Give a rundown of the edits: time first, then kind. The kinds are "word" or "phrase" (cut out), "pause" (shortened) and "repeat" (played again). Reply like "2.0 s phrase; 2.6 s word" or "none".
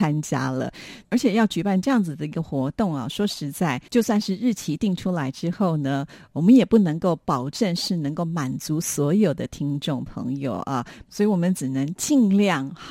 3.9 s pause